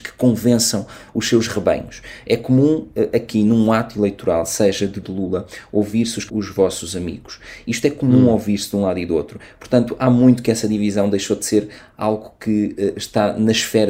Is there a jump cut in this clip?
yes; 2 cuts; at 5.0 s, 6.3 s

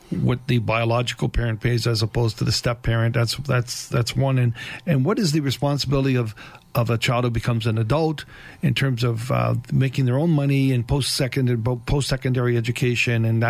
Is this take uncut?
yes; 0 cuts

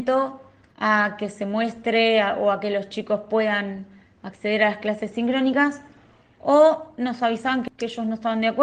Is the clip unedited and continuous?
yes; 0 cuts

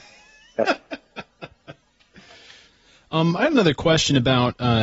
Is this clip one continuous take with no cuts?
yes; 0 cuts

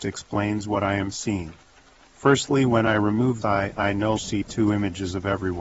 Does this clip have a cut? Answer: yes; 2 cuts; at 3.4 s, 4.2 s

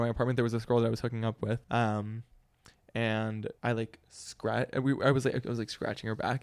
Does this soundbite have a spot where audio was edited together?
yes; 2 cuts; at 1.6 s, 3.6 s

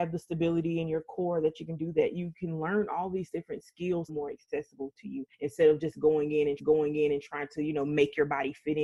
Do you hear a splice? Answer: yes; 3 cuts; at 4.1 s, 5.3 s, 6.6 s

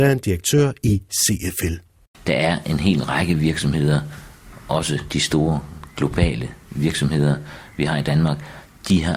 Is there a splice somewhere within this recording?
no; 0 cuts

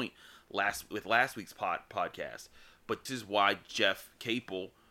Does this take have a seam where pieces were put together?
yes; 1 cut; at 3.1 s

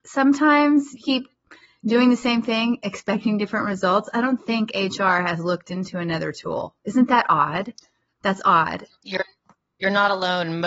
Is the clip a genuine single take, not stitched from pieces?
no; 2 cuts; at 1.0 s, 4.4 s

